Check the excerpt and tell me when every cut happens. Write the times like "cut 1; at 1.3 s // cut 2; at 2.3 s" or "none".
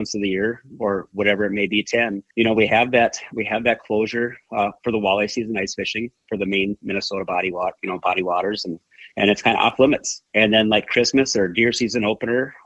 cut 1; at 2.3 s // cut 2; at 9.1 s // cut 3; at 10.3 s